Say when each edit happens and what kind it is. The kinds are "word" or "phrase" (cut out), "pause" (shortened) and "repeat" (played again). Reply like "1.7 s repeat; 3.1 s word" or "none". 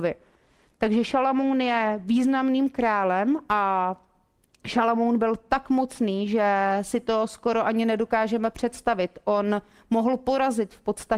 none